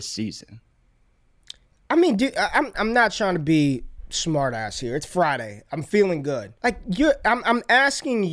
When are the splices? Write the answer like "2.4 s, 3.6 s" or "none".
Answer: 2.7 s, 6.6 s